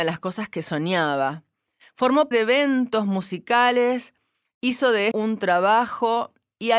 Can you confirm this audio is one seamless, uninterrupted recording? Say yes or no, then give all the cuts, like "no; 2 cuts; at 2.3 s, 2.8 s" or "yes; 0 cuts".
no; 2 cuts; at 2.3 s, 5.1 s